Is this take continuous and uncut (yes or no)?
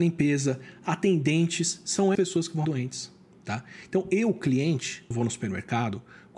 no